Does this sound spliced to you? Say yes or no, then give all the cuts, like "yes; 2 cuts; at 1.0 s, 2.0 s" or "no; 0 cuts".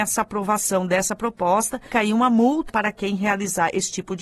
yes; 2 cuts; at 1.9 s, 2.7 s